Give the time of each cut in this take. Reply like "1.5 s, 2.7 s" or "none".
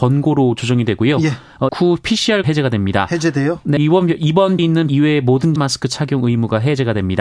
1.7 s, 2.4 s, 3.8 s, 4.6 s, 4.9 s, 5.6 s